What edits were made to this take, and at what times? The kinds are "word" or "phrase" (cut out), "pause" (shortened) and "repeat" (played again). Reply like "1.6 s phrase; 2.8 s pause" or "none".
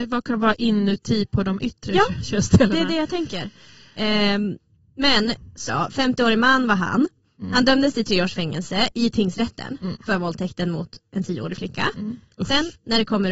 5.7 s word